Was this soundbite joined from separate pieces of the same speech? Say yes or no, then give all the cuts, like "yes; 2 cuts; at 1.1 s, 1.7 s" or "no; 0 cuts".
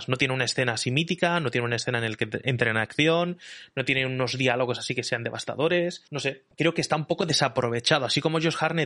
yes; 2 cuts; at 6.1 s, 6.5 s